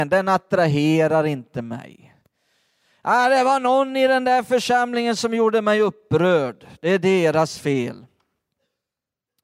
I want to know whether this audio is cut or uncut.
uncut